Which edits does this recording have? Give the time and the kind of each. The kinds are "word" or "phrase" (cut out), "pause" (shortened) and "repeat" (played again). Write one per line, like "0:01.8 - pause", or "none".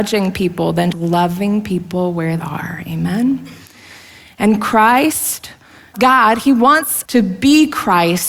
0:00.9 - word
0:02.4 - word
0:05.9 - word
0:07.0 - word